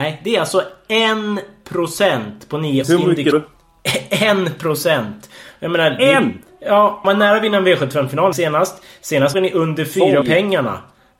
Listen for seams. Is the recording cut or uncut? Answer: cut